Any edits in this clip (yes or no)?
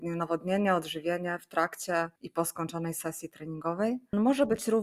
yes